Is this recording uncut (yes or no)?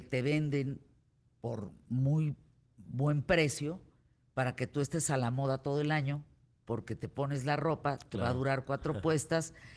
yes